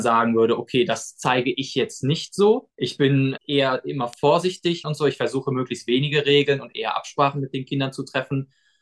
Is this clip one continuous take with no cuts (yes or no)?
no